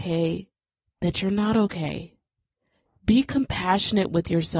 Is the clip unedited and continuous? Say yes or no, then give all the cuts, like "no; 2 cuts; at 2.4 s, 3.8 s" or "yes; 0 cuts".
yes; 0 cuts